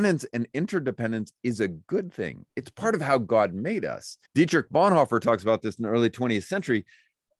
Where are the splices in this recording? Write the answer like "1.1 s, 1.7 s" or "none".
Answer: 4.3 s